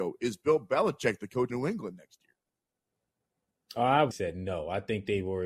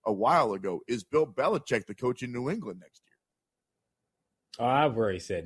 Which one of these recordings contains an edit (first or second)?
first